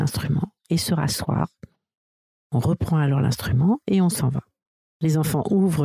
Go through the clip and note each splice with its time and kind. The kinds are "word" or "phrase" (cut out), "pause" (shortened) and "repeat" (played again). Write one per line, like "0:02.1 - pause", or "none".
none